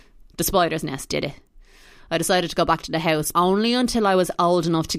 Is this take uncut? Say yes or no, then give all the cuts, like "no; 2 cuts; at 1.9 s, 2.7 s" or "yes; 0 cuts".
no; 1 cut; at 3.3 s